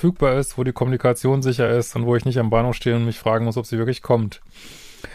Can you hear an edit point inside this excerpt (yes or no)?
no